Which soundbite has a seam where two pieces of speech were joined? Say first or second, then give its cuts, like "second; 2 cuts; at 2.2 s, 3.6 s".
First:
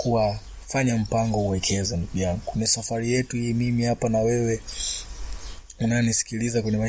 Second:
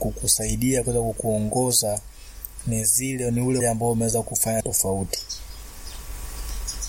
second; 2 cuts; at 3.6 s, 4.6 s